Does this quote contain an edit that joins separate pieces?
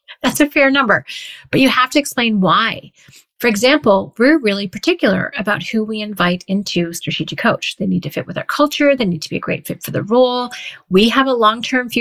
no; 0 cuts

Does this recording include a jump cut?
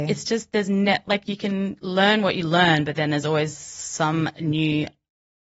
no; 0 cuts

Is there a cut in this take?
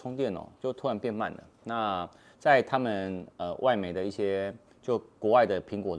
no; 0 cuts

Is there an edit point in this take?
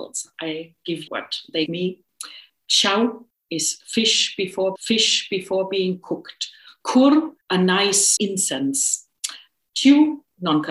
yes; 6 cuts; at 1.1 s, 1.7 s, 3.3 s, 4.8 s, 7.4 s, 8.2 s

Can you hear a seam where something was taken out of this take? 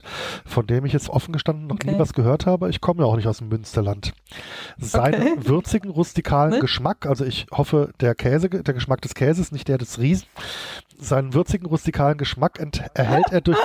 no; 0 cuts

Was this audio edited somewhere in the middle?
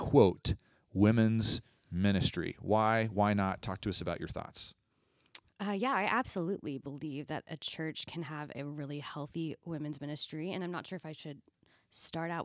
no; 0 cuts

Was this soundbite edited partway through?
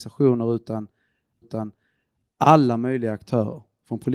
yes; 1 cut; at 1.4 s

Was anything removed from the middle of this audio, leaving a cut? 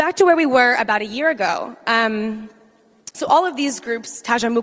no; 0 cuts

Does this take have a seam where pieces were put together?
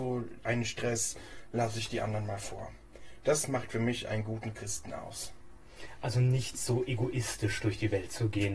no; 0 cuts

